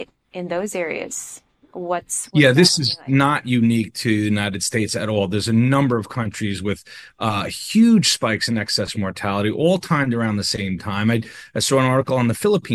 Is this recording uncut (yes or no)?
yes